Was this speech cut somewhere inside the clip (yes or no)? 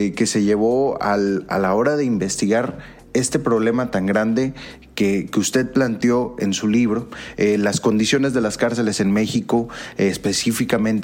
no